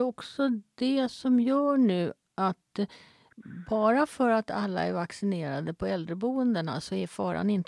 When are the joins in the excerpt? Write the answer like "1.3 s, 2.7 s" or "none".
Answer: none